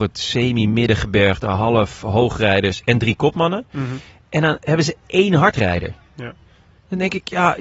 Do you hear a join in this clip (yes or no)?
no